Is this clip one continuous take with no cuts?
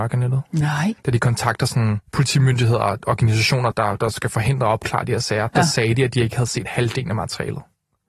no; 3 cuts; at 1.0 s, 2.1 s, 3.7 s

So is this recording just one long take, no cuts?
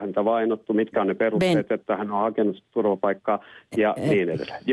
yes; 0 cuts

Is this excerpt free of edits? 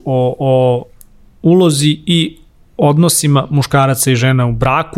yes; 0 cuts

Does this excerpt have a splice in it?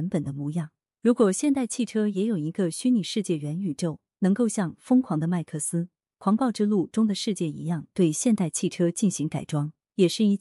no; 0 cuts

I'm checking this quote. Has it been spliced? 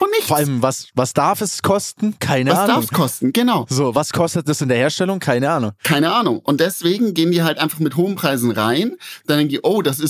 no; 0 cuts

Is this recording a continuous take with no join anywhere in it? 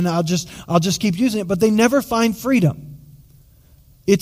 yes; 0 cuts

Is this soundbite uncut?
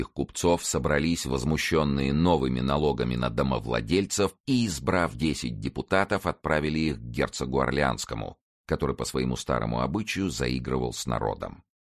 yes; 0 cuts

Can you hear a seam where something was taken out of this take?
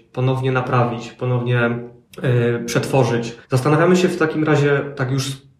yes; 1 cut; at 3.4 s

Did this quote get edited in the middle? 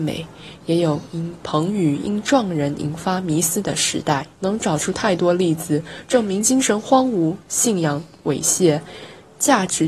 yes; 1 cut; at 4.3 s

